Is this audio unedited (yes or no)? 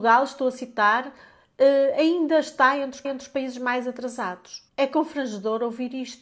no